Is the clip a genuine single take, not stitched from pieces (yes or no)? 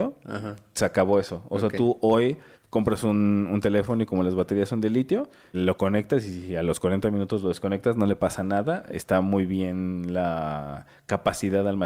no